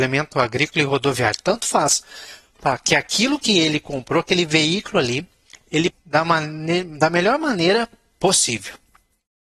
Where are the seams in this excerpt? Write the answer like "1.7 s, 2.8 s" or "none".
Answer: 5.9 s